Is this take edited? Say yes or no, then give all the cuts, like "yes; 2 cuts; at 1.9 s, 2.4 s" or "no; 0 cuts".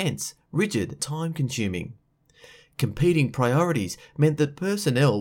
yes; 1 cut; at 1.0 s